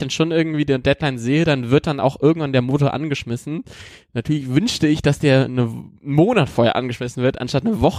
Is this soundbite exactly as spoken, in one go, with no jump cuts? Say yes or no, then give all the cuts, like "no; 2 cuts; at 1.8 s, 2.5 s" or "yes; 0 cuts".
no; 1 cut; at 6.0 s